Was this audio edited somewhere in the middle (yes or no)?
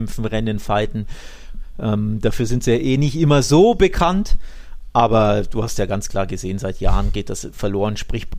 no